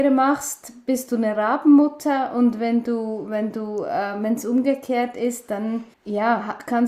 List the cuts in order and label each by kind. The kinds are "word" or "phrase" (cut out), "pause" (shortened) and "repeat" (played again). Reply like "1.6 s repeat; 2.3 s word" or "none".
5.9 s pause